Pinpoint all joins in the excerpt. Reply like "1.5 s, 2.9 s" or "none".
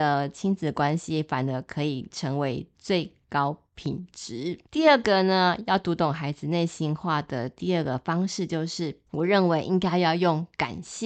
4.7 s, 9.1 s

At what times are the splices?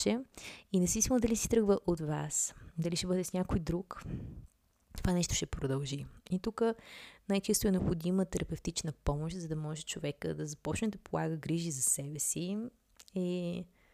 none

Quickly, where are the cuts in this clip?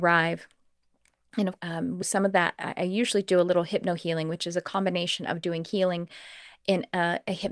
1.6 s, 2.0 s

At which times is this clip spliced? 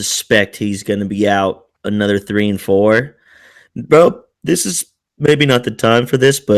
none

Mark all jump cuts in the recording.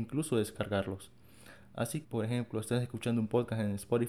2.0 s

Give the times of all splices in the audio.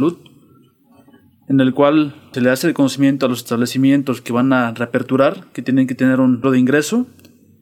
2.3 s, 6.4 s

